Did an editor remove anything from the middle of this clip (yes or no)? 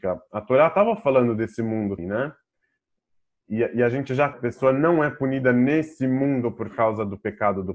yes